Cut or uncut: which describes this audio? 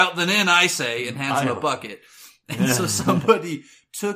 uncut